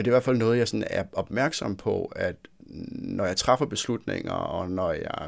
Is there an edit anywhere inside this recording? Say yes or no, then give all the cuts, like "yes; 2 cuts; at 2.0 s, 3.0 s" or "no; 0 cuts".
no; 0 cuts